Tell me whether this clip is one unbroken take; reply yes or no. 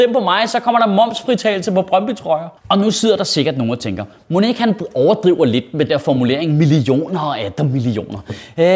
no